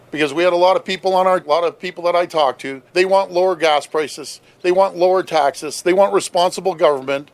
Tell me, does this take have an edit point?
yes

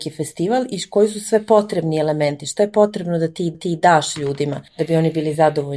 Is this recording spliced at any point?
yes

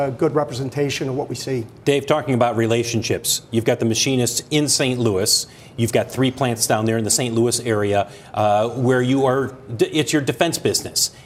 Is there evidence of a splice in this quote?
no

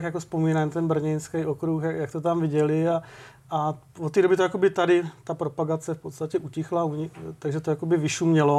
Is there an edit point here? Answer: no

